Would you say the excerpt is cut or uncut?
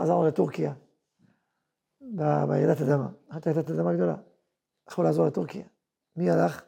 uncut